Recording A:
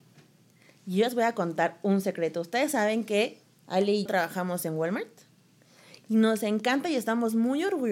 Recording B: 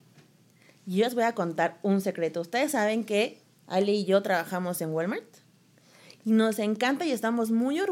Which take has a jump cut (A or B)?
A